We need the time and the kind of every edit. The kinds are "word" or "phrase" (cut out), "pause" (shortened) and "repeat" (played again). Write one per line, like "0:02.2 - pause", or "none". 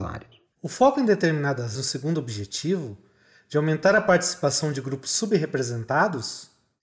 0:01.8 - phrase